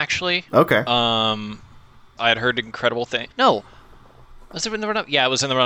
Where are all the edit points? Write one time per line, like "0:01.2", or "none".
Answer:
0:02.2
0:03.3